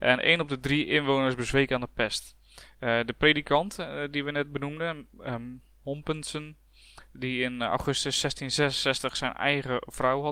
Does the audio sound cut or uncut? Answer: uncut